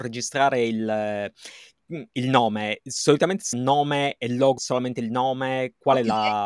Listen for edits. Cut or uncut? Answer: cut